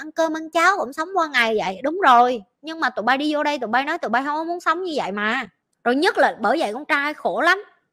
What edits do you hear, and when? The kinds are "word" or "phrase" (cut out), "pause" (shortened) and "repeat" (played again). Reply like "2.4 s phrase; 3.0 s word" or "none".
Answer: none